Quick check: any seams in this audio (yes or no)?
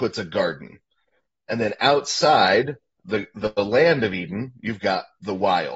no